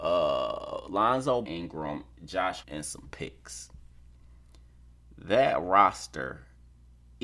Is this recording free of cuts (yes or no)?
no